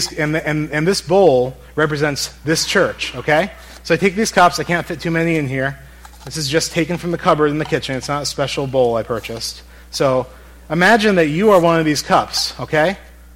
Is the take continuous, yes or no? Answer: yes